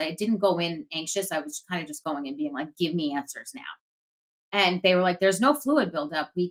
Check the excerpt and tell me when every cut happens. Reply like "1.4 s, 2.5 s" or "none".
none